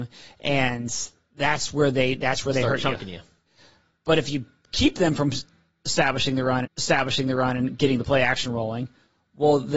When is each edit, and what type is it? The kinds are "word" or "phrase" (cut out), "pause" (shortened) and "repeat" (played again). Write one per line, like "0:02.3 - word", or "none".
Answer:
0:06.6 - repeat